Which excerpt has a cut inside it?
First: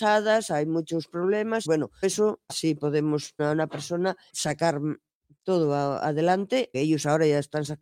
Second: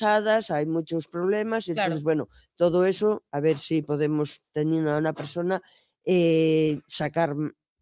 first; 6 cuts; at 1.7 s, 2.0 s, 2.5 s, 3.4 s, 4.3 s, 6.7 s

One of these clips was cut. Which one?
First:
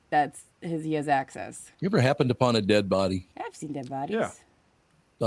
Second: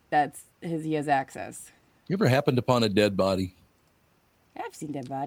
first; 2 cuts; at 1.7 s, 3.3 s

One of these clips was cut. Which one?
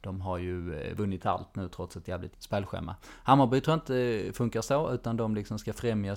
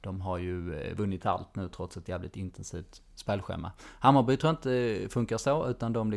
first; 1 cut; at 2.3 s

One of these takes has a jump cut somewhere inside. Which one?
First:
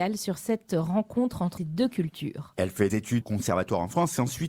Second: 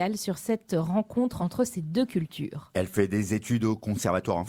first; 3 cuts; at 1.6 s, 2.9 s, 3.2 s

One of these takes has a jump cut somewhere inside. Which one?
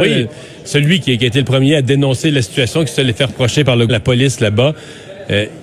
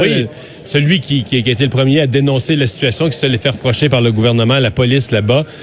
first; 2 cuts; at 1.0 s, 3.9 s

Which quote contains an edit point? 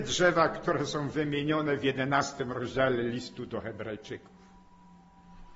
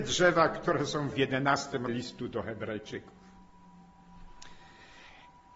second; 2 cuts; at 1.1 s, 1.9 s

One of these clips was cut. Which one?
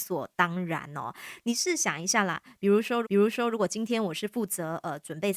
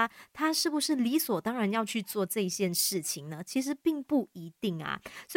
first; 1 cut; at 3.0 s

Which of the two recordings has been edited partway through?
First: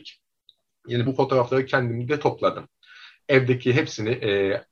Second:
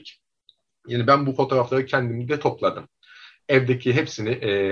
first; 1 cut; at 1.1 s

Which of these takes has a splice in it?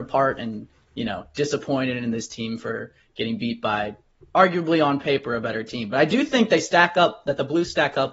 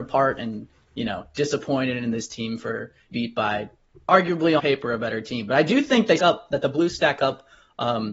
second; 3 cuts; at 3.1 s, 4.6 s, 6.2 s

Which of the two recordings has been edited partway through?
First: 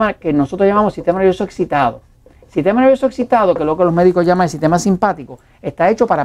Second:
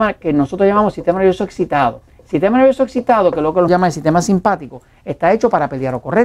second; 2 cuts; at 2.1 s, 3.7 s

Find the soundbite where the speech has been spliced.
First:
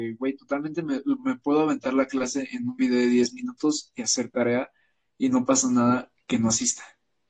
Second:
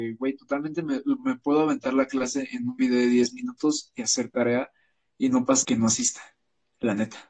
second; 1 cut; at 5.6 s

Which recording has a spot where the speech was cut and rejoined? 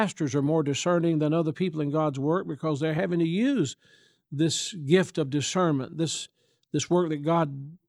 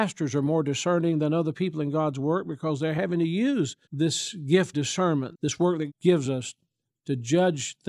second; 4 cuts; at 3.8 s, 4.7 s, 5.3 s, 5.9 s

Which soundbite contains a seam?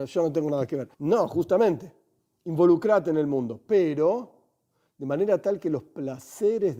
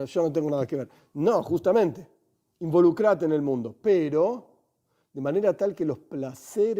first; 1 cut; at 0.9 s

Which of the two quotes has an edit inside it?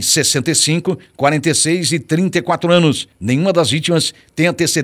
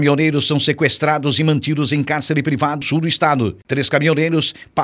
second; 1 cut; at 2.8 s

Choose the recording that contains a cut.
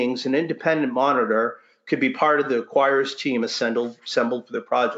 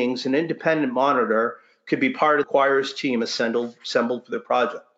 second; 1 cut; at 2.4 s

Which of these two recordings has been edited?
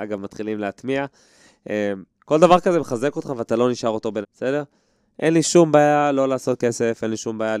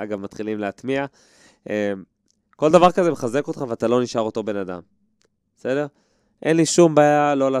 first; 2 cuts; at 2.1 s, 4.2 s

